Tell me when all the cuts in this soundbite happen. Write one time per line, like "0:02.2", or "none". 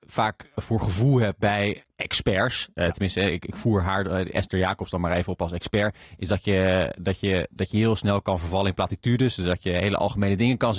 0:01.9